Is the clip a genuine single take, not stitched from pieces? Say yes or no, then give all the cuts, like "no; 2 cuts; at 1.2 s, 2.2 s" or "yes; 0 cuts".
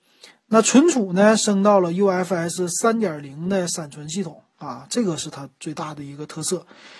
yes; 0 cuts